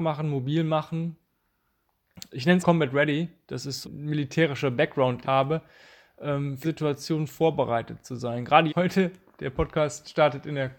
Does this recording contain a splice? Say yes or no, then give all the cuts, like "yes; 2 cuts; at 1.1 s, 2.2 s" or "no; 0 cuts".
yes; 6 cuts; at 2.3 s, 2.6 s, 3.8 s, 5.2 s, 6.6 s, 8.7 s